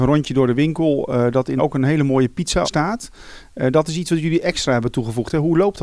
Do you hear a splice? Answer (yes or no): yes